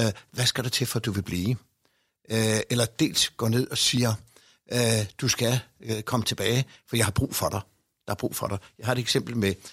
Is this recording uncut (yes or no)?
yes